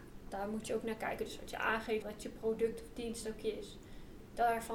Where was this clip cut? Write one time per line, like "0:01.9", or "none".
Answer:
0:02.0